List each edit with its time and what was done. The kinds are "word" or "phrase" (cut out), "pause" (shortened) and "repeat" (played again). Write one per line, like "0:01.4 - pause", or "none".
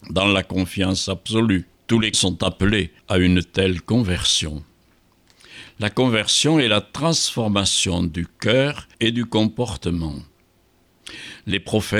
0:01.7 - pause
0:02.1 - word
0:03.0 - pause
0:08.9 - pause